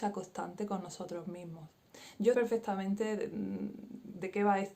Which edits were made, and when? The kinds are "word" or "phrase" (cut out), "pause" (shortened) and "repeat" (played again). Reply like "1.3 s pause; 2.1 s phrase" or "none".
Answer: 2.3 s word